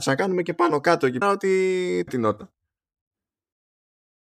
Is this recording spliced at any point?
yes; 2 cuts; at 1.2 s, 2.1 s

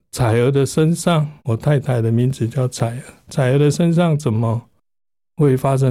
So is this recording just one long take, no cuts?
no; 1 cut; at 1.4 s

